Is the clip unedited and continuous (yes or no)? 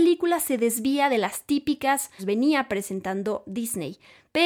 no